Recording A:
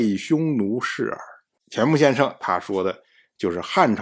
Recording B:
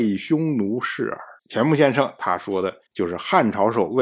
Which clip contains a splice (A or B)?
B